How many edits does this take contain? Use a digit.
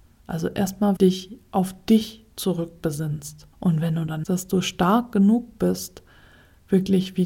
3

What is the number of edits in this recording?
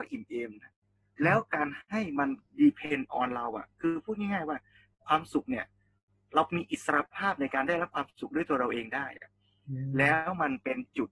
0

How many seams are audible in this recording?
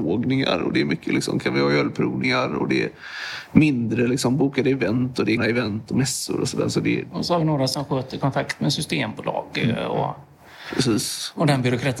1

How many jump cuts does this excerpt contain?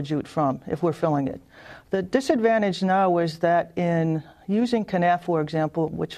0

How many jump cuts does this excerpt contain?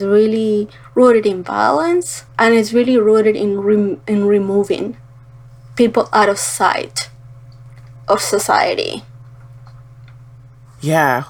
1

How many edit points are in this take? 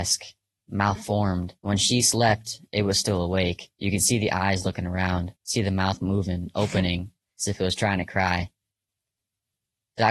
3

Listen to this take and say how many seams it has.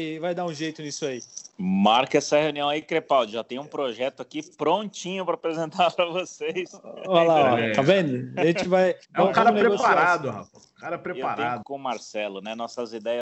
2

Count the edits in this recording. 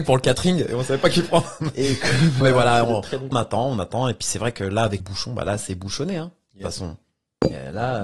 3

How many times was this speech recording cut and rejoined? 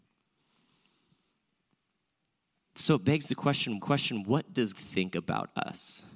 2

